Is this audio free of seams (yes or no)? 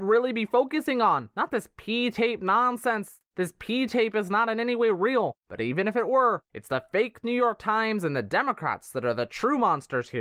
yes